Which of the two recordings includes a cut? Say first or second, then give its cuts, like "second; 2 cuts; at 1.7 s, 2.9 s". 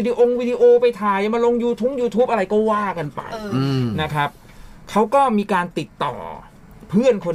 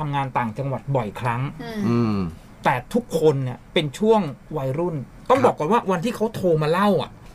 second; 1 cut; at 3.6 s